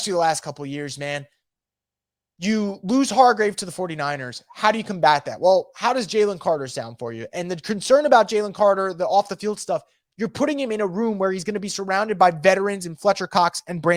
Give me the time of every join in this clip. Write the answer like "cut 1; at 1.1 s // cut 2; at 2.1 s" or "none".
none